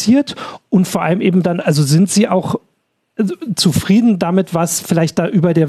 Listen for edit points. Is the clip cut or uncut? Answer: uncut